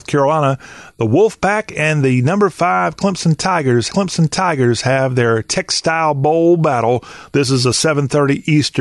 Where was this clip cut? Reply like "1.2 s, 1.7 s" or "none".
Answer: 3.9 s